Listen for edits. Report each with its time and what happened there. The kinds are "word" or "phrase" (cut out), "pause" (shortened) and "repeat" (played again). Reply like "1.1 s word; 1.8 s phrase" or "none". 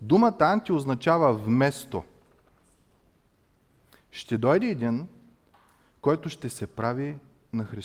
none